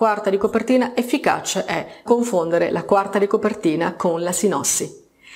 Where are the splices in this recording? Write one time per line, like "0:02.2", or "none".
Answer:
0:02.1